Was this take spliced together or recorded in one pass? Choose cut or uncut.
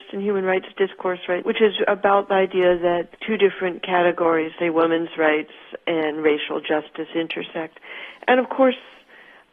cut